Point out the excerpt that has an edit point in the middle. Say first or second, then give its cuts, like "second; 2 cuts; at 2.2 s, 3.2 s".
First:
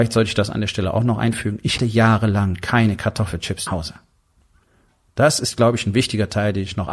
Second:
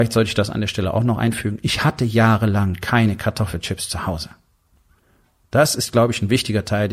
first; 2 cuts; at 1.8 s, 3.7 s